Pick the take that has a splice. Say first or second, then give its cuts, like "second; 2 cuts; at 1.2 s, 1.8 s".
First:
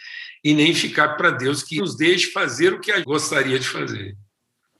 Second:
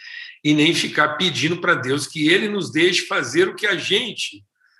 first; 3 cuts; at 1.2 s, 1.8 s, 3.0 s